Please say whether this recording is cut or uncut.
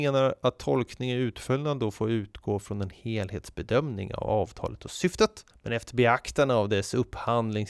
cut